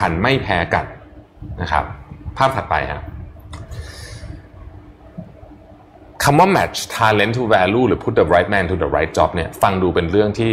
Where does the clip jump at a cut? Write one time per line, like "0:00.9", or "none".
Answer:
none